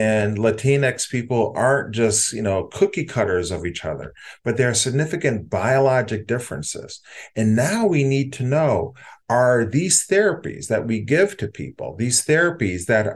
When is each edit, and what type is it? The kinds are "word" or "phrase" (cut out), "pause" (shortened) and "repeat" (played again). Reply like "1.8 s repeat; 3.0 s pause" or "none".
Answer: none